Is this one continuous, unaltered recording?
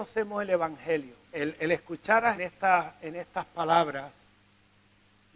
no; 2 cuts; at 1.2 s, 2.3 s

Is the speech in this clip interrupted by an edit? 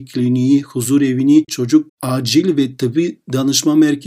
yes; 2 cuts; at 1.5 s, 1.9 s

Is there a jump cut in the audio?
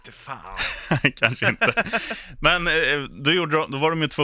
no; 0 cuts

